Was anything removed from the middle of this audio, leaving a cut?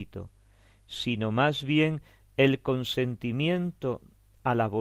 no; 0 cuts

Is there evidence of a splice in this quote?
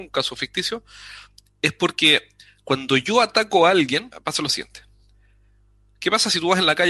no; 0 cuts

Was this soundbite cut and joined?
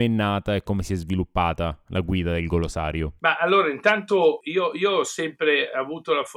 yes; 1 cut; at 3.2 s

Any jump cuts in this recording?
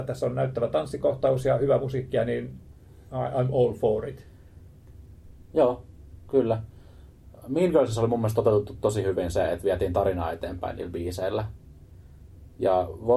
no; 0 cuts

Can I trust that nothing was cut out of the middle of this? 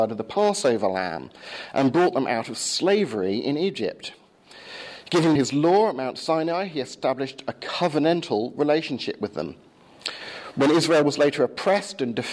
no; 1 cut; at 5.4 s

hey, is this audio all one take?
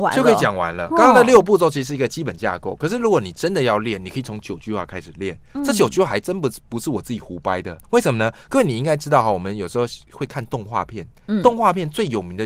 no; 1 cut; at 7.8 s

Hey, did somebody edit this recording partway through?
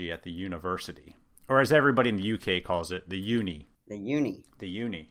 no; 0 cuts

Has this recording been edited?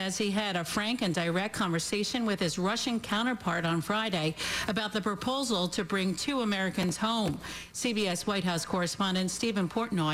no; 0 cuts

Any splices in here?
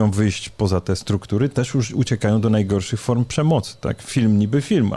no; 0 cuts

